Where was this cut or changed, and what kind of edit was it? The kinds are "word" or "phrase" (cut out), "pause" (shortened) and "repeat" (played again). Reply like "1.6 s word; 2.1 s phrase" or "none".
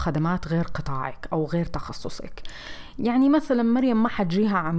none